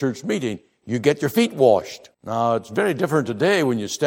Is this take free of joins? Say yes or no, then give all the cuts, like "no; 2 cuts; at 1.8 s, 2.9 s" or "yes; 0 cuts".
no; 1 cut; at 2.1 s